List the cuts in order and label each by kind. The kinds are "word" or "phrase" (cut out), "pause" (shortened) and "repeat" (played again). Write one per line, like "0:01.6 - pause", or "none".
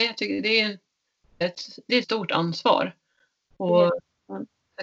0:01.4 - word
0:02.0 - word